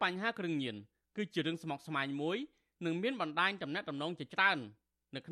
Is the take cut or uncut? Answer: uncut